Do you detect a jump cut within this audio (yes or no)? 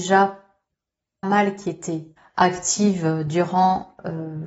yes